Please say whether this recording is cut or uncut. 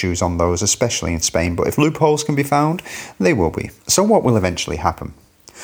cut